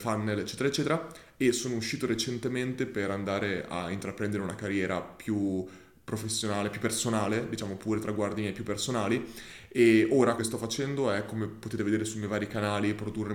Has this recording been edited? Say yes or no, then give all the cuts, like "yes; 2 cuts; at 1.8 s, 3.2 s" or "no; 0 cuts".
yes; 1 cut; at 10.4 s